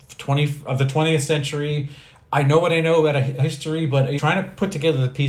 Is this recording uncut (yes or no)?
no